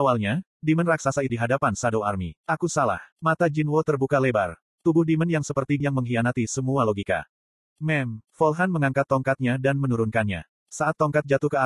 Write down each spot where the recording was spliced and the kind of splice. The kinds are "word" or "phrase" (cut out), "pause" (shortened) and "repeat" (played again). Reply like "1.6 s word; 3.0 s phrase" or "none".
1.3 s word; 2.4 s pause; 3.1 s pause; 5.8 s phrase; 8.3 s pause